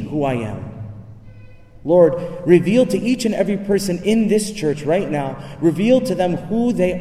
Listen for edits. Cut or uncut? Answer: uncut